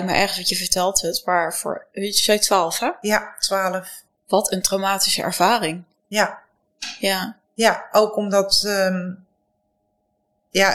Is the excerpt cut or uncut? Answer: uncut